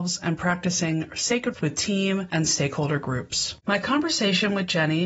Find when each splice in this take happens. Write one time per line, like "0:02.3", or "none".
0:01.5